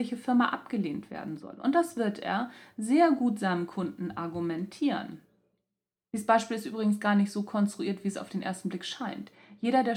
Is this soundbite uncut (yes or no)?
yes